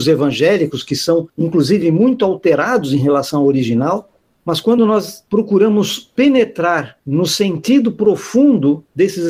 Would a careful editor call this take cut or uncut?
uncut